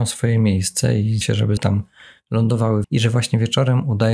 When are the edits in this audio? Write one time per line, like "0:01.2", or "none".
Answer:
0:01.2
0:01.6
0:02.8